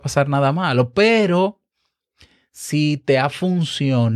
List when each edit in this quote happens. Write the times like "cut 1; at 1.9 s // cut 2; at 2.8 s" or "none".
none